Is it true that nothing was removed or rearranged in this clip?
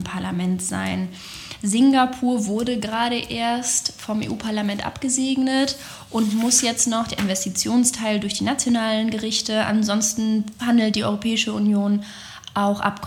no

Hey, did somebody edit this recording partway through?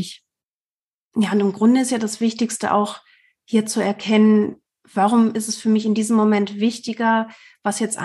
no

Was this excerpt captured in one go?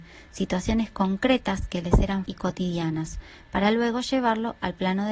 no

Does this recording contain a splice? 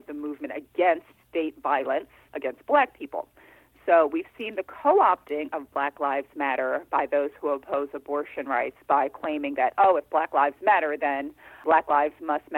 no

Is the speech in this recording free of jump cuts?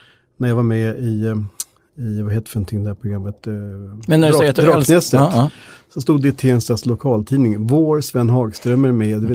yes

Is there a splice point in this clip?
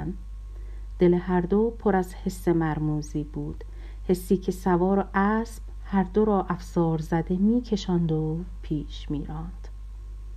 no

